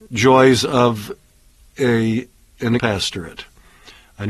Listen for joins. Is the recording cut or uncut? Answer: cut